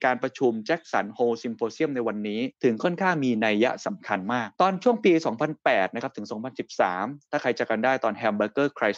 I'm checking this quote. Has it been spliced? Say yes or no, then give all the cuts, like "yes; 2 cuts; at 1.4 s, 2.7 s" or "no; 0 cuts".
yes; 2 cuts; at 2.5 s, 4.5 s